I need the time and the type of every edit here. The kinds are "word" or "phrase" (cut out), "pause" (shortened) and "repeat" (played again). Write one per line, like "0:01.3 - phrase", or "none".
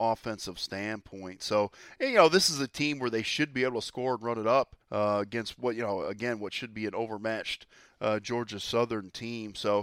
0:04.8 - pause